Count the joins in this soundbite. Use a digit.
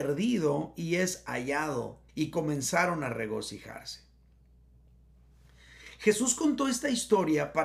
1